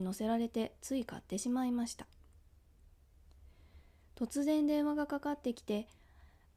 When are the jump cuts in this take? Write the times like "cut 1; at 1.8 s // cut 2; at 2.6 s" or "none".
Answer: none

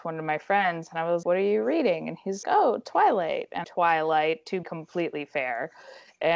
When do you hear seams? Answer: cut 1; at 1.2 s // cut 2; at 2.4 s // cut 3; at 3.6 s // cut 4; at 4.6 s

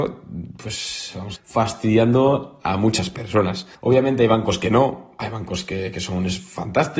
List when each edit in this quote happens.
cut 1; at 1.4 s // cut 2; at 3.7 s

